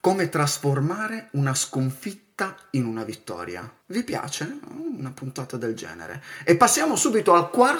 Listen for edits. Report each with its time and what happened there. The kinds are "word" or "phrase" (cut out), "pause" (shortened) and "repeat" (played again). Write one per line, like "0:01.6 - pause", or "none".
0:03.8 - pause